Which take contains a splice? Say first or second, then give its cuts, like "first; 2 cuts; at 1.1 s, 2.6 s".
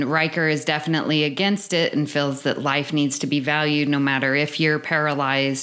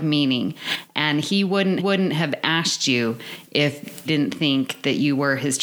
second; 2 cuts; at 1.8 s, 4.1 s